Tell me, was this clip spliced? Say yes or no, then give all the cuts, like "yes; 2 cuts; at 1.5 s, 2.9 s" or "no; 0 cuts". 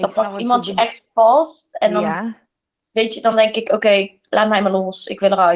no; 0 cuts